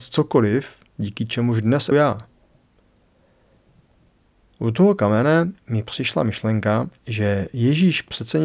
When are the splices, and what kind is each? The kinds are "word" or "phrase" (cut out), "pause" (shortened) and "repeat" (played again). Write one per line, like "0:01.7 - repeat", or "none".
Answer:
0:01.9 - word
0:05.6 - pause
0:07.0 - pause